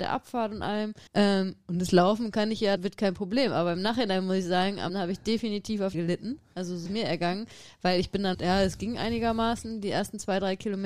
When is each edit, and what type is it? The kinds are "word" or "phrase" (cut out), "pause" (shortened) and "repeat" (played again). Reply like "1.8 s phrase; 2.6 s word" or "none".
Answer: 1.1 s pause; 2.8 s word; 4.9 s word; 5.9 s phrase; 6.8 s word; 8.3 s phrase